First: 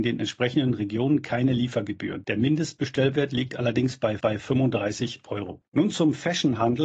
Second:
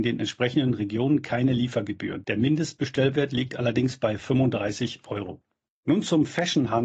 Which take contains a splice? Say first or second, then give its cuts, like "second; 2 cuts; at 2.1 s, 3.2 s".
first; 2 cuts; at 4.2 s, 5.7 s